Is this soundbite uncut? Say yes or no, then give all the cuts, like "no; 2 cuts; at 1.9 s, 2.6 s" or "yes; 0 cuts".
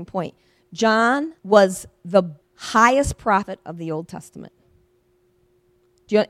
no; 2 cuts; at 1.4 s, 2.4 s